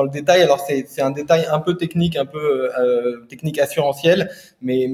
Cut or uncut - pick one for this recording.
uncut